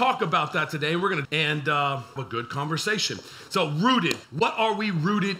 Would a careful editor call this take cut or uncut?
cut